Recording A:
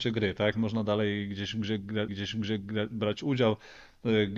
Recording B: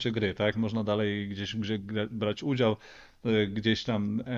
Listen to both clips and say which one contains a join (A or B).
A